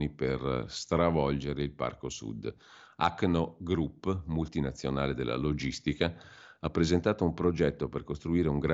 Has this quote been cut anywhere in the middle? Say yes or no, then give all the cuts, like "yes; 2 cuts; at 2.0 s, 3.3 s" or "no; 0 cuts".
no; 0 cuts